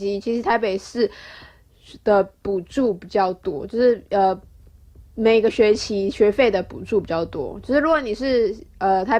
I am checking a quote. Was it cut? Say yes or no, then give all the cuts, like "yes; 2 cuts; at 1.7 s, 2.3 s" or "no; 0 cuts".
yes; 1 cut; at 4.1 s